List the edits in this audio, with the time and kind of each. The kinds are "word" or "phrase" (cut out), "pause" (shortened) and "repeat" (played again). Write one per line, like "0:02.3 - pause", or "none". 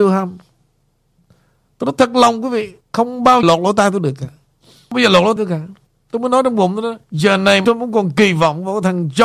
0:02.8 - pause
0:03.4 - word
0:04.4 - pause
0:05.4 - word
0:05.9 - pause
0:07.0 - pause
0:07.6 - word